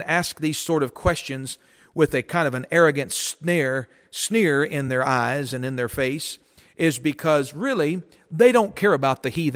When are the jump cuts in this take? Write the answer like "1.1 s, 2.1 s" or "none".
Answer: none